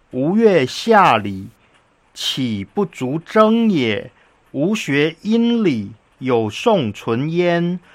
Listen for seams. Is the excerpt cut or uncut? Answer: uncut